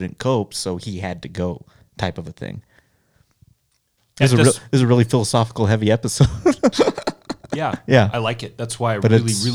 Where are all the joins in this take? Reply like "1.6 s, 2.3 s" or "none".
none